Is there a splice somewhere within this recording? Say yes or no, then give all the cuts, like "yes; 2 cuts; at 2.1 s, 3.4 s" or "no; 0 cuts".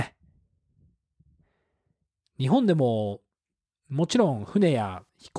no; 0 cuts